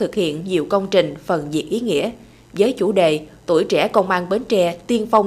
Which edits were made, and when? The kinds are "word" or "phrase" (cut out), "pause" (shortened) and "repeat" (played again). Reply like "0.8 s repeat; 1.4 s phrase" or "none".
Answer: none